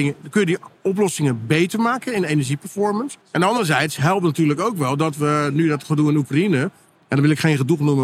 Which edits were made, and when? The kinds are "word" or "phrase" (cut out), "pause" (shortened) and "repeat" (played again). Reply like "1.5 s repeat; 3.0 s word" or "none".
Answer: 3.2 s pause